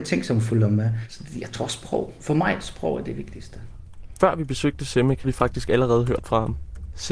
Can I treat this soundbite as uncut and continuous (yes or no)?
no